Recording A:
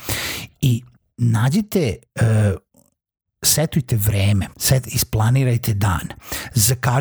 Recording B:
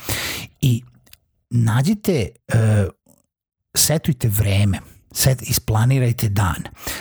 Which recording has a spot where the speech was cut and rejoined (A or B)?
A